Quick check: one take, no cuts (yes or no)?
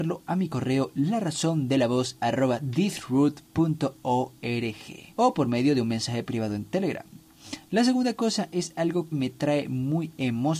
no